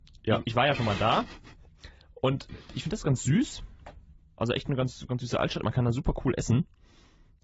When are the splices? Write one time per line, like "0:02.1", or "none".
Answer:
none